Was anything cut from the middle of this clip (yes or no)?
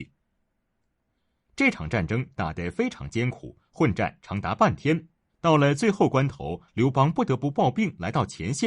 yes